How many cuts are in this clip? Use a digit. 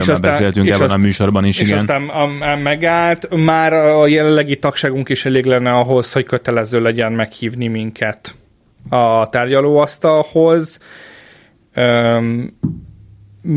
0